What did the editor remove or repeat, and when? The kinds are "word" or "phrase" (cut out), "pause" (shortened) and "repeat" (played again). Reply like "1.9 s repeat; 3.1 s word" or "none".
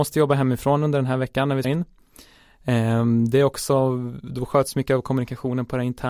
1.6 s word

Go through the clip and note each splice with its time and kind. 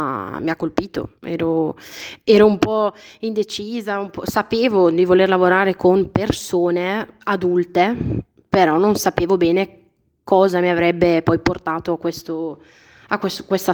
1.2 s pause

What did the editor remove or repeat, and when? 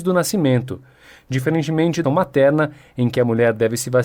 2.0 s phrase

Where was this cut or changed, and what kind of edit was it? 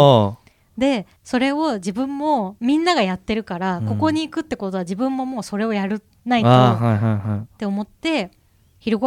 1.2 s pause

